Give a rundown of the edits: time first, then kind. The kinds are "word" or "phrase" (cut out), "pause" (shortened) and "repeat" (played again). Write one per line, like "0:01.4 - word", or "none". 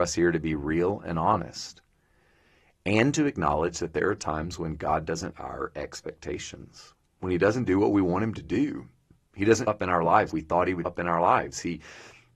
0:05.3 - word
0:09.7 - word
0:10.3 - word
0:10.8 - word